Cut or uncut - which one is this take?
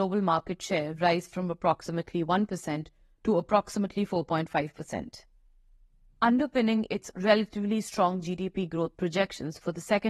uncut